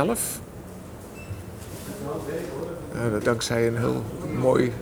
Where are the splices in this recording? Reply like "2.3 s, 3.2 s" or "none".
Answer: 3.2 s